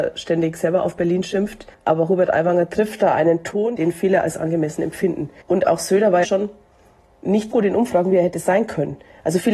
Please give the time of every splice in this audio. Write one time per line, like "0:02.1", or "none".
0:01.7
0:05.4
0:06.2
0:07.5